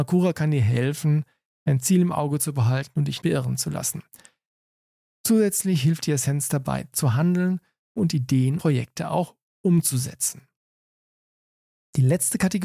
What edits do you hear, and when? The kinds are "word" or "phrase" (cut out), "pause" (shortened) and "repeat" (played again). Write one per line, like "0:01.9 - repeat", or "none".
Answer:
0:03.2 - word
0:06.9 - word
0:08.6 - word